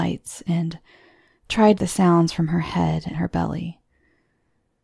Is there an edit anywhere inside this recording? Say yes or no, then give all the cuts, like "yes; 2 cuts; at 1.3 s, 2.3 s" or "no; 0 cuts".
yes; 2 cuts; at 1.8 s, 3.1 s